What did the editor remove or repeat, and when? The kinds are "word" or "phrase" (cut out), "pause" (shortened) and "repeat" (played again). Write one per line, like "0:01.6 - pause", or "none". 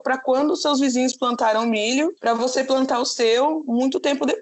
0:02.2 - pause